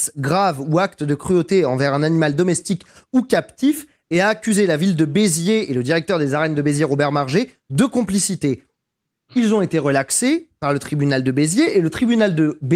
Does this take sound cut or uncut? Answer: uncut